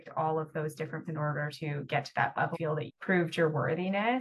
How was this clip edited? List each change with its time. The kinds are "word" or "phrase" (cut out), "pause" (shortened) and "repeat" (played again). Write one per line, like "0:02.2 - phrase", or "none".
0:01.0 - word
0:02.5 - word
0:02.9 - word